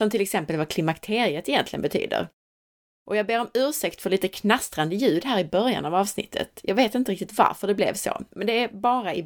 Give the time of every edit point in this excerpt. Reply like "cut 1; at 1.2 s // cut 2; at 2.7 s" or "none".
none